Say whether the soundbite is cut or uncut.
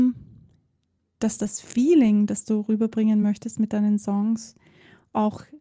uncut